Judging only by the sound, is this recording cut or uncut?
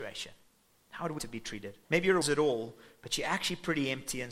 cut